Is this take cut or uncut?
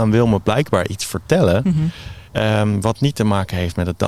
cut